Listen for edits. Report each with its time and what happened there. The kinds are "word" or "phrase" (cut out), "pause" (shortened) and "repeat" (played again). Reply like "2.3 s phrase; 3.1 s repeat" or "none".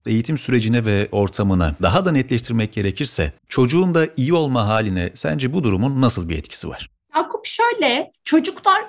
3.4 s pause